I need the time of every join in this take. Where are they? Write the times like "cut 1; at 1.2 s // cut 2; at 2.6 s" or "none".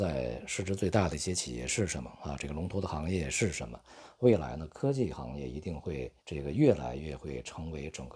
cut 1; at 6.2 s